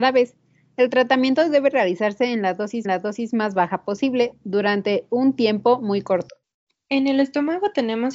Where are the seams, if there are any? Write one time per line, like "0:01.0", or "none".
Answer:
0:02.8